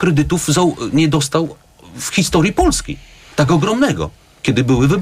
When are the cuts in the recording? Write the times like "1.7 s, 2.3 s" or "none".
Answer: none